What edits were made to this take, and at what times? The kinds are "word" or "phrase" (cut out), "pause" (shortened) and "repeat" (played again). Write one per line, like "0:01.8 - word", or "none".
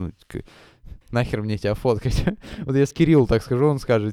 0:01.0 - pause
0:02.9 - word